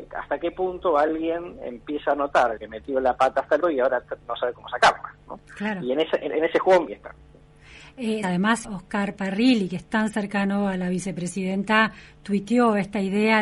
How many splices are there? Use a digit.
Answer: 6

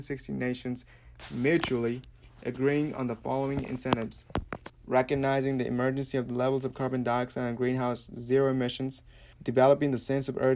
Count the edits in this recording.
2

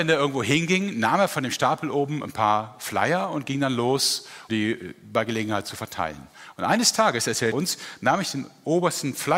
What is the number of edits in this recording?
2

